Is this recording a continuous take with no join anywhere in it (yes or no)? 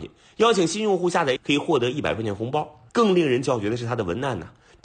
no